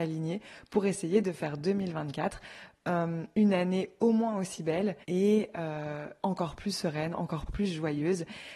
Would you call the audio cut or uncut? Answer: cut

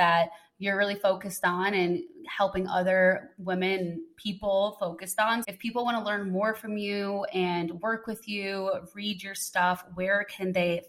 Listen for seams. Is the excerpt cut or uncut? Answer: cut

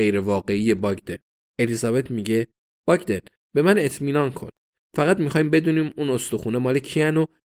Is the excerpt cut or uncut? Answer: cut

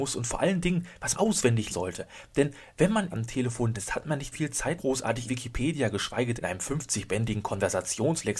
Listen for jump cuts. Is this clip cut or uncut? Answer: cut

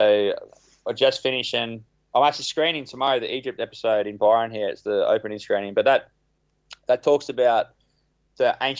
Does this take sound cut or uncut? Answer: uncut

